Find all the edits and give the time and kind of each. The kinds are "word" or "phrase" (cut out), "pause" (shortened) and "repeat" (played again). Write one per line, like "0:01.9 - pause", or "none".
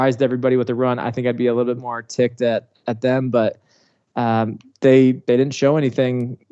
none